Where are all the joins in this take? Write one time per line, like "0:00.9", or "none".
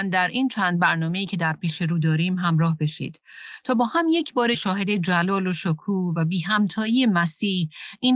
0:04.5